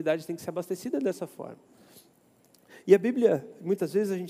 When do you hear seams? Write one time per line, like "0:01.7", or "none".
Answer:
none